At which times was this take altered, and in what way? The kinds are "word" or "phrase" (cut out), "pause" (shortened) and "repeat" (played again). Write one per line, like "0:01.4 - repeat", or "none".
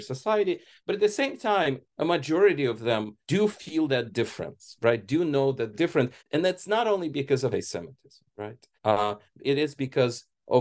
0:03.2 - pause
0:05.7 - word
0:06.2 - pause
0:07.5 - word
0:08.7 - pause